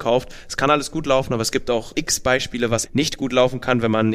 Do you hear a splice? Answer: yes; 2 cuts; at 1.9 s, 2.8 s

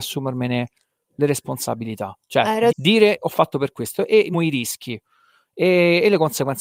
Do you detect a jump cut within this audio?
yes; 3 cuts; at 2.7 s, 3.5 s, 4.3 s

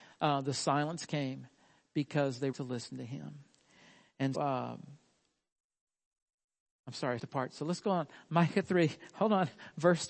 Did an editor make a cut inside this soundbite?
yes; 3 cuts; at 2.5 s, 4.3 s, 7.2 s

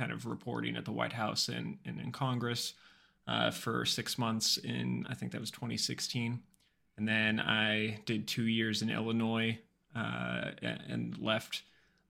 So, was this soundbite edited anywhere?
no; 0 cuts

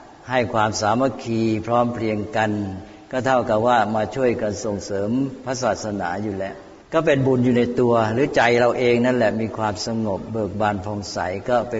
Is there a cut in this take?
yes; 1 cut; at 6.8 s

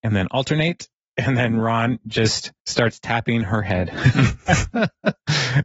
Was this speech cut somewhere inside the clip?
yes; 2 cuts; at 0.9 s, 2.6 s

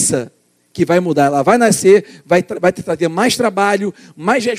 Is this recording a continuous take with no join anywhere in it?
yes; 0 cuts

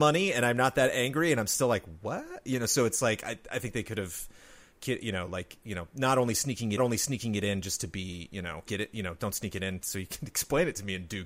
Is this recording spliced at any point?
yes; 2 cuts; at 6.8 s, 8.7 s

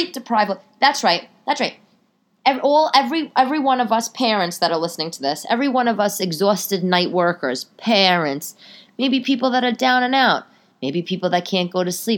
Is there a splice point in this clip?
no; 0 cuts

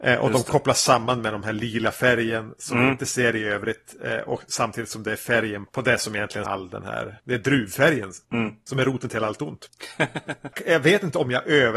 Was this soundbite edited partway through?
yes; 2 cuts; at 5.7 s, 6.4 s

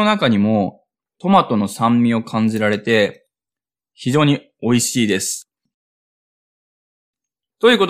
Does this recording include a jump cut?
no; 0 cuts

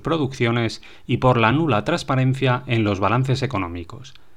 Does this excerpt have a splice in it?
no; 0 cuts

